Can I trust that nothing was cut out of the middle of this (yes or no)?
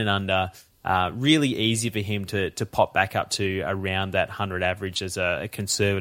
yes